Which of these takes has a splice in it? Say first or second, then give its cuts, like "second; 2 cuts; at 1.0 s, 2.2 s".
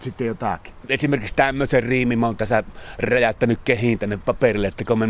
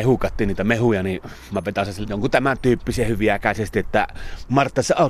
second; 1 cut; at 2.0 s